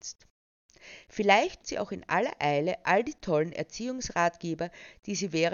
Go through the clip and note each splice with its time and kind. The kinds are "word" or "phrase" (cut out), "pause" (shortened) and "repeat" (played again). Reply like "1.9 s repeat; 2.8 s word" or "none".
1.6 s word